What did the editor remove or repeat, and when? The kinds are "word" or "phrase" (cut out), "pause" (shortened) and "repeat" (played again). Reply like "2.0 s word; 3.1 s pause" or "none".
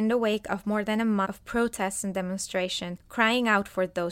1.2 s word